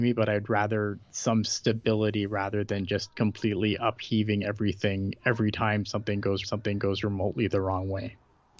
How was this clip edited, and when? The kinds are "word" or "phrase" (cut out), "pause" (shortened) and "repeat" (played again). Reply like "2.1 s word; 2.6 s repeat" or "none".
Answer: 1.0 s pause; 6.4 s repeat